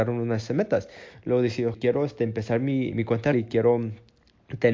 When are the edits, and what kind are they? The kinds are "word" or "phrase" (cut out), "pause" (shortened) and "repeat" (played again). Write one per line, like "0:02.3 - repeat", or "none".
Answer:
0:01.7 - word
0:02.9 - word
0:03.3 - word